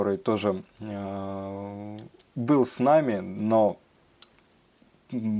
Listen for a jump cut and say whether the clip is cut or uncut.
uncut